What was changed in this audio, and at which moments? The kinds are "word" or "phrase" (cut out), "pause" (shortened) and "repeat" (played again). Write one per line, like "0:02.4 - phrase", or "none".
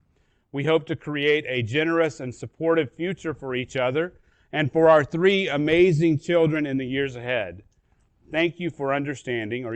none